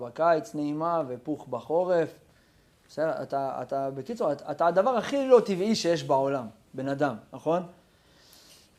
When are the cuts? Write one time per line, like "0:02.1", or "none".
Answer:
none